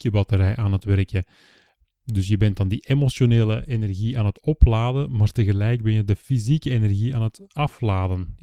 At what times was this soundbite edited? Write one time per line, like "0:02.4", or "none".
none